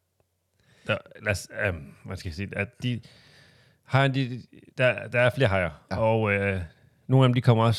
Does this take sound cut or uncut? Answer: uncut